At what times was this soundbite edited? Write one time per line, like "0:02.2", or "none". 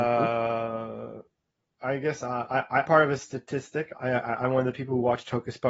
0:02.9